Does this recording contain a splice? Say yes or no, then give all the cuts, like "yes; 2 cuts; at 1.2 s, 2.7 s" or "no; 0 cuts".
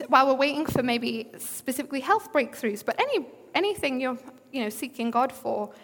no; 0 cuts